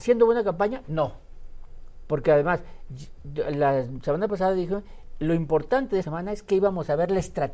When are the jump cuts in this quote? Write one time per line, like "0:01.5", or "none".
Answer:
0:06.0

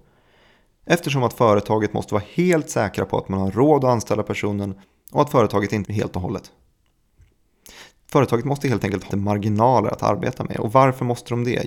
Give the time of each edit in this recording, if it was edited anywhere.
0:04.8
0:05.8
0:09.1

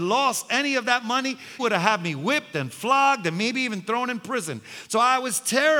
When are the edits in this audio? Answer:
0:01.6

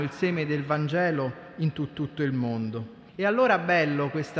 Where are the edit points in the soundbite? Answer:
0:01.9
0:03.1

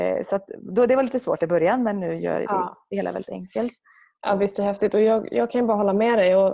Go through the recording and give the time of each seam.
none

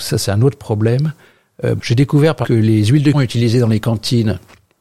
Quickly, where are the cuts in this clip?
0:01.8
0:02.4
0:03.1

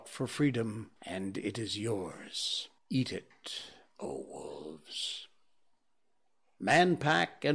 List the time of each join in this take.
0:01.0
0:02.8

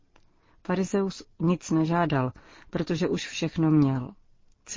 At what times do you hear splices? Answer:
none

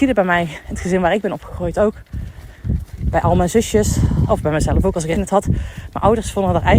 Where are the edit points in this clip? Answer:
0:04.3
0:05.1

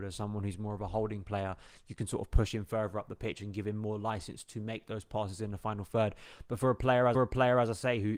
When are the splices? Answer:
0:07.1

